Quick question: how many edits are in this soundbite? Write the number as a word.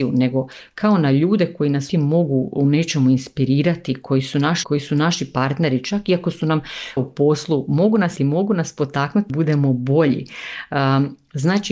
five